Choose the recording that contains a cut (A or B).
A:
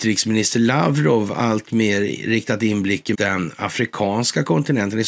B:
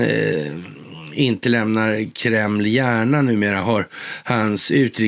A